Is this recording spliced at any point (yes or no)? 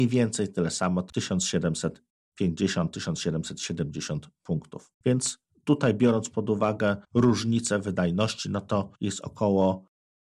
yes